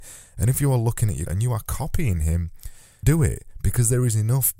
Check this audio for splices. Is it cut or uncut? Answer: cut